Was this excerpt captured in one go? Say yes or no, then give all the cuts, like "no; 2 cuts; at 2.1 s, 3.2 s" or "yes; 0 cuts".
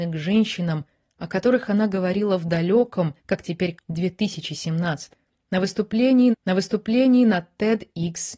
no; 4 cuts; at 3.2 s, 3.8 s, 5.1 s, 6.3 s